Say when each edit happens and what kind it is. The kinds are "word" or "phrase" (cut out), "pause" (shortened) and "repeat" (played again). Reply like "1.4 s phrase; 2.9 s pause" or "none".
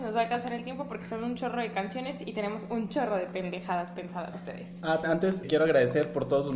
4.3 s word; 5.0 s word; 5.4 s word